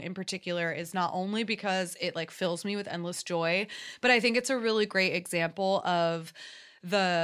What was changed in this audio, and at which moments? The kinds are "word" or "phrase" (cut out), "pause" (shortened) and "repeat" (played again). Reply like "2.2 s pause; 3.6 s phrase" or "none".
none